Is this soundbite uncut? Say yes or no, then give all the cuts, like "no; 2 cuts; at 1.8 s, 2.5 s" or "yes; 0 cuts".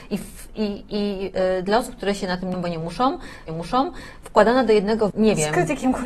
no; 3 cuts; at 2.5 s, 3.5 s, 5.1 s